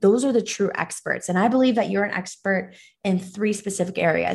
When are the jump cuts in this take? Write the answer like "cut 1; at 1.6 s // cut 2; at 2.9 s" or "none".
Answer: none